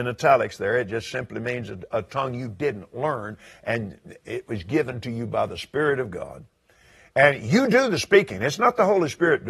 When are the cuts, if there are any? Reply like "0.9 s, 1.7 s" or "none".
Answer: none